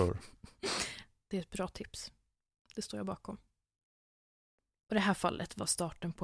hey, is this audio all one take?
yes; 0 cuts

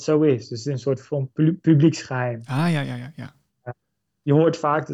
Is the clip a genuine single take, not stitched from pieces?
yes; 0 cuts

